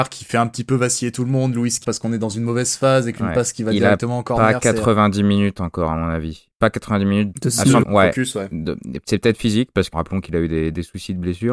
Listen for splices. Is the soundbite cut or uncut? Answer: cut